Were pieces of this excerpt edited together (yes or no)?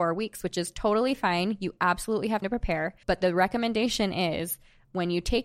yes